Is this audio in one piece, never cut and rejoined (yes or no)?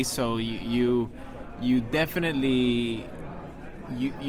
yes